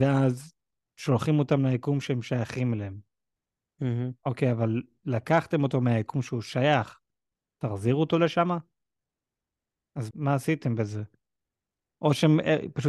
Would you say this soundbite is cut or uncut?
cut